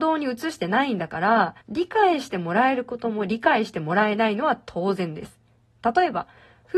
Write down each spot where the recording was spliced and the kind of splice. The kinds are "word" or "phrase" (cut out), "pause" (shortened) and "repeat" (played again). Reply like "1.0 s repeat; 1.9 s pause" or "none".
1.6 s pause

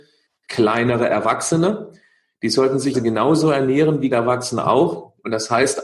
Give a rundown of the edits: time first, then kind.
2.9 s word; 4.1 s word

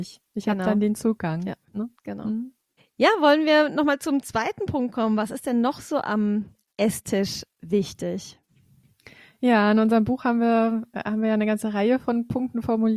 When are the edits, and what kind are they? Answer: 2.8 s pause

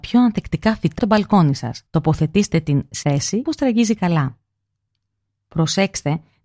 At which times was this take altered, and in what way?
1.0 s word; 1.9 s pause; 3.0 s word; 3.4 s phrase

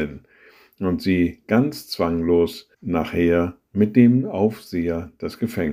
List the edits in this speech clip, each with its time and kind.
2.7 s pause

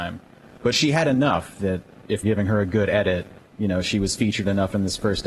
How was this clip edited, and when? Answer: 2.2 s word; 3.4 s pause

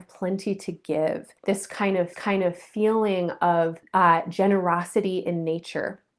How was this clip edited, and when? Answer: 1.4 s pause; 2.1 s repeat; 3.8 s pause

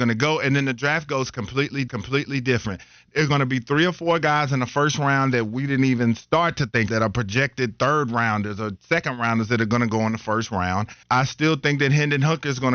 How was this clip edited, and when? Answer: 1.9 s repeat; 6.9 s word; 11.0 s pause

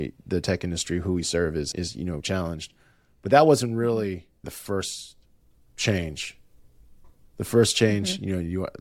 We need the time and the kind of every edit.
1.7 s word; 2.2 s word; 4.4 s word; 7.2 s pause

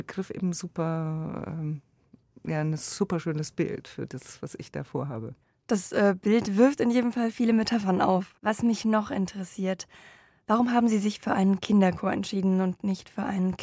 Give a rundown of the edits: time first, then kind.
8.4 s pause

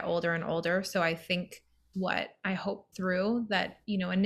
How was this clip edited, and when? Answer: 1.9 s word; 2.9 s word

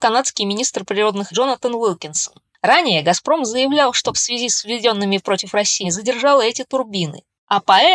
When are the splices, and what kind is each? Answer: 1.3 s word; 4.1 s word; 5.8 s word

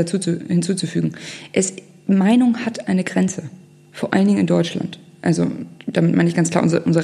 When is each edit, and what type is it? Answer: none

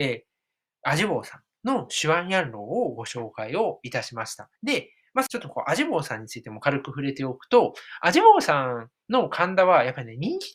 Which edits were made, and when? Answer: 4.6 s pause; 5.3 s phrase

